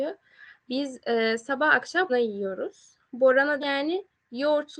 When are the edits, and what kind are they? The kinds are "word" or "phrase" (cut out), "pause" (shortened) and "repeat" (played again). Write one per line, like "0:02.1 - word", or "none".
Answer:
0:02.1 - word
0:03.6 - word